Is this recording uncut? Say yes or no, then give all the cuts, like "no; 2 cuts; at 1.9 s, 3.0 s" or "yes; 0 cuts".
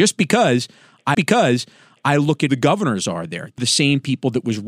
no; 3 cuts; at 1.1 s, 2.5 s, 3.6 s